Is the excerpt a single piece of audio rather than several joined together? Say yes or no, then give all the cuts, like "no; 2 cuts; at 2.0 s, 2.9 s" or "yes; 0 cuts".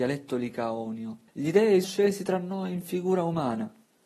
no; 2 cuts; at 1.3 s, 1.8 s